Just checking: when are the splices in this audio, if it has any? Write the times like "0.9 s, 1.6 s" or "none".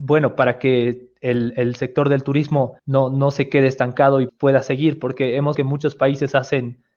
2.8 s, 4.3 s, 5.5 s

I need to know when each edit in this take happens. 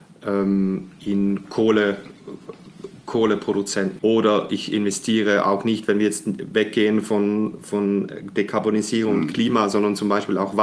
4.0 s

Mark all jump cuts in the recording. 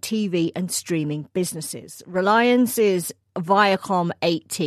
none

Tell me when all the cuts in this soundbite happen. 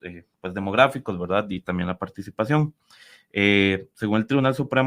none

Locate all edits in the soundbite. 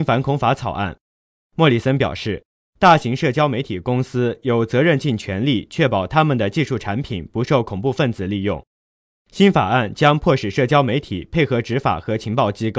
none

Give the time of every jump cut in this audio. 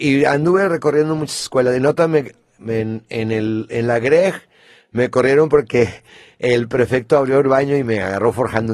none

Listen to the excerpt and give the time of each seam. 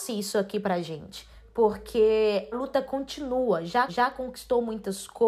2.5 s, 3.9 s

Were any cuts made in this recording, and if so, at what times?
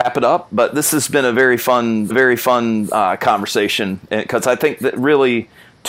2.1 s

